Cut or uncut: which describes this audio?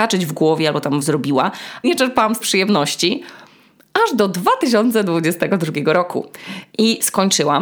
cut